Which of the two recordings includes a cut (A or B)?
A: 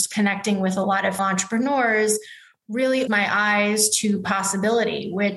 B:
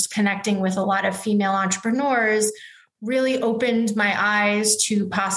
A